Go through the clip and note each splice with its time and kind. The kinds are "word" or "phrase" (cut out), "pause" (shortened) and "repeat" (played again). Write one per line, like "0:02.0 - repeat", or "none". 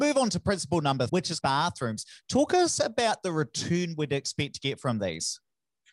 0:01.1 - word
0:01.4 - phrase